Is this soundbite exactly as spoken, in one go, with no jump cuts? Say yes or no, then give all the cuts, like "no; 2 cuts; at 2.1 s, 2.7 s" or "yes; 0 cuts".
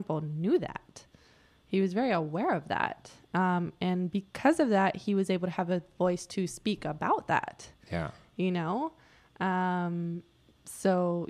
yes; 0 cuts